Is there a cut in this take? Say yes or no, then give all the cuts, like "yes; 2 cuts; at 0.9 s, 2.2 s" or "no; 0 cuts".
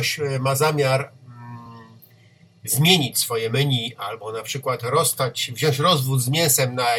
no; 0 cuts